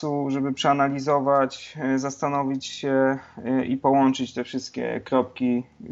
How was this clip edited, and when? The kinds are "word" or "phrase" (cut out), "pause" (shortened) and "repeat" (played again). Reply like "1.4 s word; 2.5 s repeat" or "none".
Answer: none